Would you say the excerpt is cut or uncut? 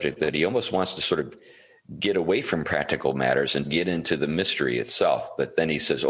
cut